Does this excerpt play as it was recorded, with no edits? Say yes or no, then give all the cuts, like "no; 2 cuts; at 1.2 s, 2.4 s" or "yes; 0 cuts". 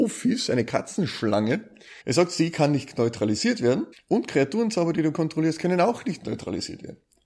no; 2 cuts; at 2.0 s, 3.9 s